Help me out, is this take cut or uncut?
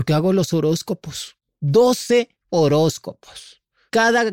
uncut